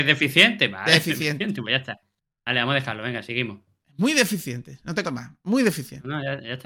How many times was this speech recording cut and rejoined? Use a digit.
1